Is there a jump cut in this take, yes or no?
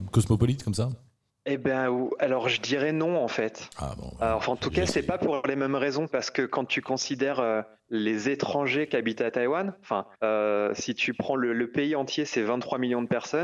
yes